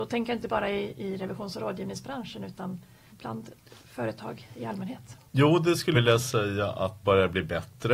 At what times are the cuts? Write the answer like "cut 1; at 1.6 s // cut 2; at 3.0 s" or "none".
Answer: cut 1; at 3.1 s // cut 2; at 3.8 s // cut 3; at 5.3 s // cut 4; at 5.9 s // cut 5; at 7.0 s

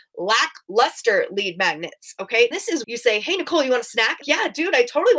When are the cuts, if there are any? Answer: cut 1; at 2.5 s // cut 2; at 2.8 s // cut 3; at 4.2 s

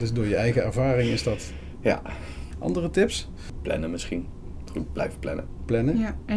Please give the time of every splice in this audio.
none

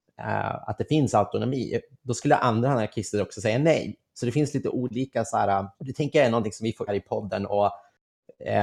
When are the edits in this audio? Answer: cut 1; at 5.7 s // cut 2; at 6.9 s

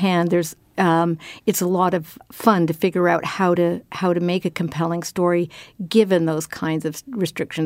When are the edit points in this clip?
none

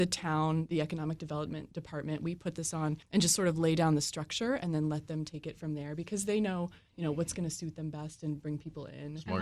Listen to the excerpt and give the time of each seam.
cut 1; at 3.0 s

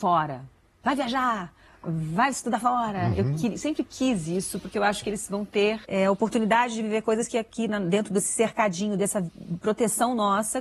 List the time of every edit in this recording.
cut 1; at 1.7 s // cut 2; at 5.8 s

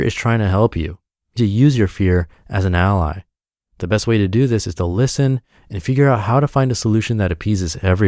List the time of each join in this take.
cut 1; at 1.4 s

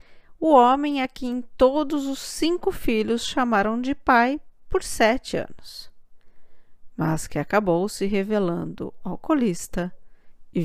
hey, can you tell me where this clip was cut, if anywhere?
none

